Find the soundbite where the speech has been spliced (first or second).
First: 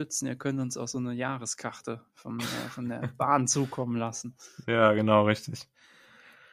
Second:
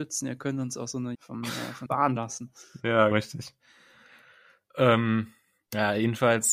second